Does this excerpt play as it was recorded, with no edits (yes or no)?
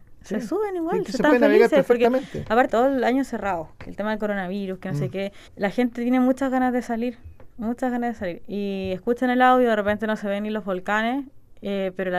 no